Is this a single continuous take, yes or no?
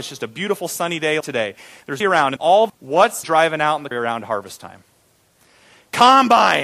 no